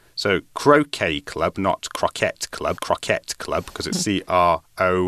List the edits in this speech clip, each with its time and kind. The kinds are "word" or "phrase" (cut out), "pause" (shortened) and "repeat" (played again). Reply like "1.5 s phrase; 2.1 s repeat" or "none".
2.8 s repeat; 3.9 s word